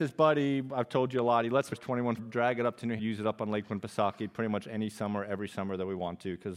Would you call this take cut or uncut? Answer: cut